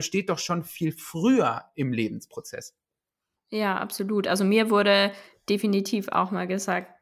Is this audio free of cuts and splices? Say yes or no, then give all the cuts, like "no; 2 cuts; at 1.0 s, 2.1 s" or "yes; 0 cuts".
yes; 0 cuts